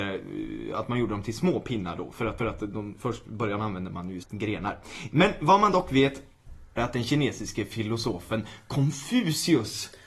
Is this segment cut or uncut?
cut